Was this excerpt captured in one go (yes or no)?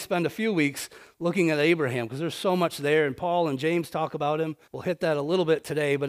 no